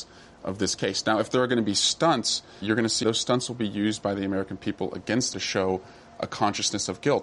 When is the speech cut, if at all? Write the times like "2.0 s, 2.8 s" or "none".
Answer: 2.6 s, 3.0 s, 5.3 s